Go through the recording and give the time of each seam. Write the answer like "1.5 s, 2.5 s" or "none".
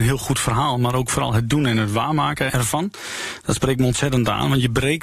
2.5 s